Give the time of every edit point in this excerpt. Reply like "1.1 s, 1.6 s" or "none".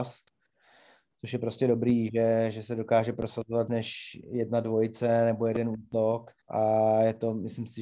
3.7 s, 6.4 s